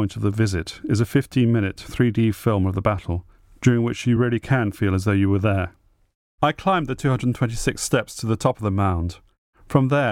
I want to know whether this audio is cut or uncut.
uncut